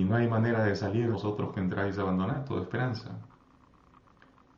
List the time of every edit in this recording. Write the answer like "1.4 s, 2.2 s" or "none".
1.1 s